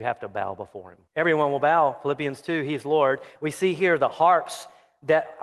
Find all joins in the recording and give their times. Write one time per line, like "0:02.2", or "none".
0:01.1